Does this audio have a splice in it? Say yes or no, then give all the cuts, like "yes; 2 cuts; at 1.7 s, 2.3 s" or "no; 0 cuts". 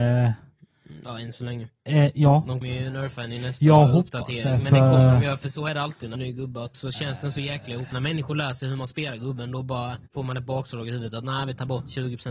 yes; 5 cuts; at 2.6 s, 6.1 s, 6.7 s, 7.9 s, 10.1 s